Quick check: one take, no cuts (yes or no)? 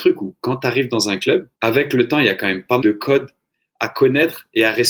no